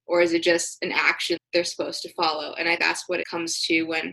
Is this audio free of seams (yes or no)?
no